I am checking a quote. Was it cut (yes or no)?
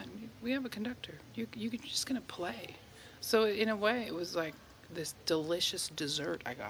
no